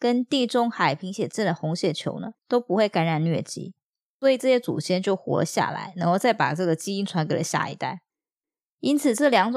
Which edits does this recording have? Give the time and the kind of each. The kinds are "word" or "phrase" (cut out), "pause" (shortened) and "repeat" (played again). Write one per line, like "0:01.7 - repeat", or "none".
0:02.4 - pause